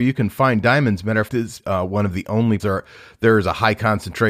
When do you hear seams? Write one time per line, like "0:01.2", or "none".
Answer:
0:01.3
0:01.6
0:02.6